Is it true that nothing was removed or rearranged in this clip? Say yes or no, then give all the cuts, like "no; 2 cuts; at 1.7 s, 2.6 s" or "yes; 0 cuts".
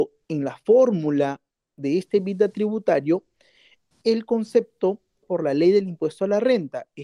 no; 2 cuts; at 3.9 s, 5.2 s